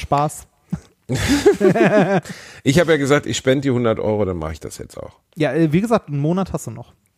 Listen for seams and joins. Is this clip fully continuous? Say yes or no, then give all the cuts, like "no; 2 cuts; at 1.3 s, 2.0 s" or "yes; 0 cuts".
no; 1 cut; at 5.3 s